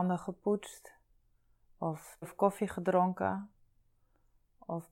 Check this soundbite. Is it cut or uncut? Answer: cut